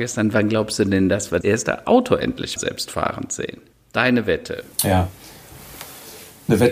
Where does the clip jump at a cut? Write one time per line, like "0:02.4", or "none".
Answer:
0:01.4
0:02.6
0:03.7
0:04.7